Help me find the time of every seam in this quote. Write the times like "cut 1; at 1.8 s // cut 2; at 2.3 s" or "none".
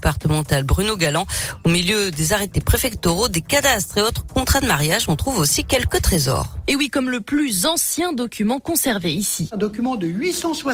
none